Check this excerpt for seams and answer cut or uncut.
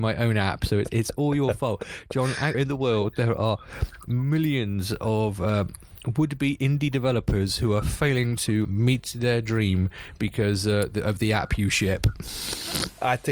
cut